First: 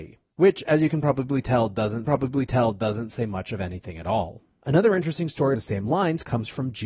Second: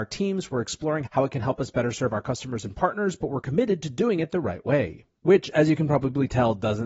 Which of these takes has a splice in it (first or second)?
first